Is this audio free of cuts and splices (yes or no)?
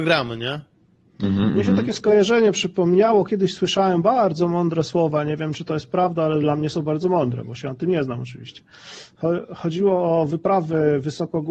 yes